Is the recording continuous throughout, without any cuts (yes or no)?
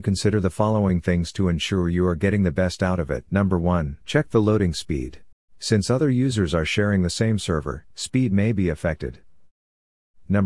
no